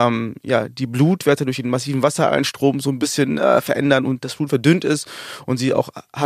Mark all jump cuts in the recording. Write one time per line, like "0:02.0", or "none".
none